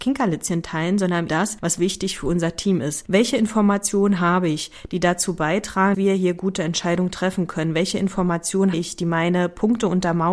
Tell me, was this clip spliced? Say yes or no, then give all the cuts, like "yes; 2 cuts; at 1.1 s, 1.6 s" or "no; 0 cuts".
yes; 3 cuts; at 1.3 s, 5.9 s, 8.7 s